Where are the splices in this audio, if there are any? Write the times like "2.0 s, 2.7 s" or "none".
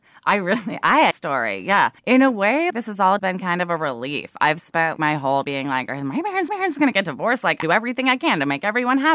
1.1 s, 2.0 s, 2.7 s, 3.2 s, 5.0 s, 5.4 s, 6.5 s, 7.6 s